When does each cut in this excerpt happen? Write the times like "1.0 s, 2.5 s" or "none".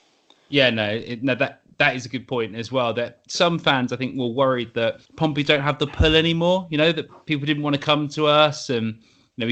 5.1 s